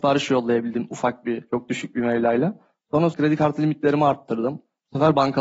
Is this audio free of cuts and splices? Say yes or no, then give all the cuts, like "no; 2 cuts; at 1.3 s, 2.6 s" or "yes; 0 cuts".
no; 1 cut; at 3.1 s